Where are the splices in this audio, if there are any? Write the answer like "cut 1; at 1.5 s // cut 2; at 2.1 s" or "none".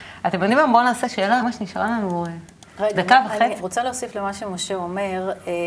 cut 1; at 1.4 s // cut 2; at 3.6 s